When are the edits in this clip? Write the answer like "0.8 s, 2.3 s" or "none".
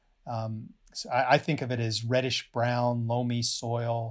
none